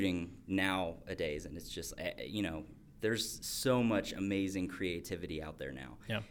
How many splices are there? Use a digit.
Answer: 0